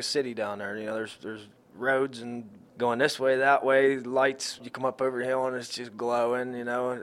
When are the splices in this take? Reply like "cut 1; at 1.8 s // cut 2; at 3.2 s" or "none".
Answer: none